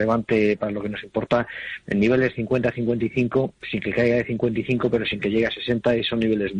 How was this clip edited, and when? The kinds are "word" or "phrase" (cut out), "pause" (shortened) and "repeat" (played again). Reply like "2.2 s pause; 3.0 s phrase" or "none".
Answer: none